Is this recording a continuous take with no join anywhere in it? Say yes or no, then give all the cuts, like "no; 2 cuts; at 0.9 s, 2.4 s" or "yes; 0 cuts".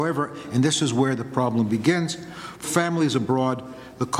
no; 1 cut; at 2.6 s